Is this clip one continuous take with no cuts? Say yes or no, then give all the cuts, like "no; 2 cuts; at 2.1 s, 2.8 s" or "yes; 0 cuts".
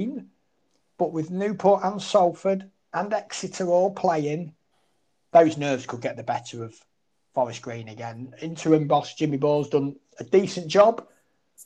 yes; 0 cuts